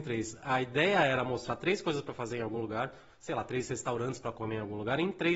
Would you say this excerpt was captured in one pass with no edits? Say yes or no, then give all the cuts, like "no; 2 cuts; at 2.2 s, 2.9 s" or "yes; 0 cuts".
yes; 0 cuts